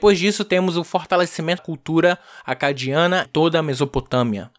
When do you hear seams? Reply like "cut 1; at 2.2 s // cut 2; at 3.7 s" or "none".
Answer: cut 1; at 1.6 s // cut 2; at 3.2 s